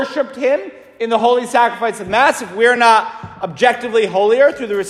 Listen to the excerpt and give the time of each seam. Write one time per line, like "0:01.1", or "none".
none